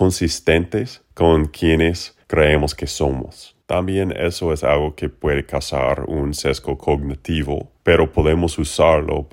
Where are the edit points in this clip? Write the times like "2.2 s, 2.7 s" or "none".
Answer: 3.6 s, 7.8 s